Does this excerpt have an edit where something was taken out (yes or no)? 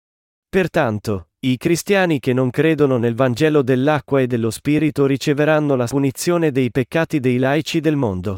yes